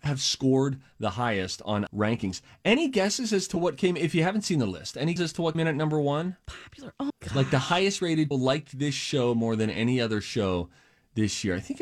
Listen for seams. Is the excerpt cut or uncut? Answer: cut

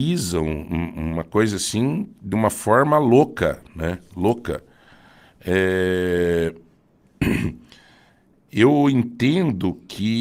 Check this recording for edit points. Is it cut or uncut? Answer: uncut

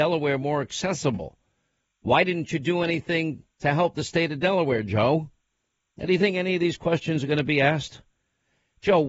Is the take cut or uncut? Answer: uncut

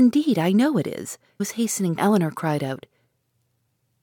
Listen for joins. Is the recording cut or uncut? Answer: cut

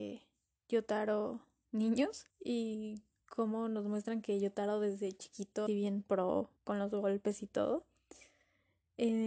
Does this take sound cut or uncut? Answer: cut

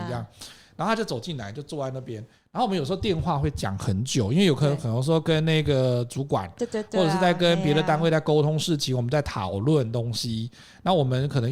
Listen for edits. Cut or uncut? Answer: uncut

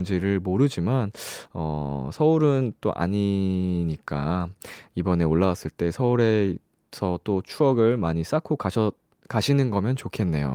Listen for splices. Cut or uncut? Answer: uncut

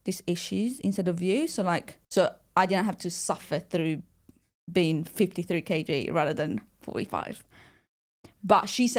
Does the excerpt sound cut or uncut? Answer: cut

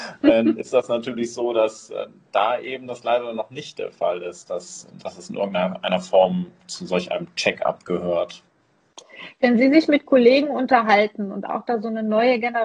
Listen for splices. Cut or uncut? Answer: uncut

